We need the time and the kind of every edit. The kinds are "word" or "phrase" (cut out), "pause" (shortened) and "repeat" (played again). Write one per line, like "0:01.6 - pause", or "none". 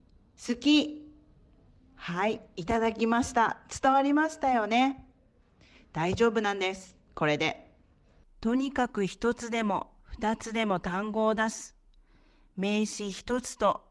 none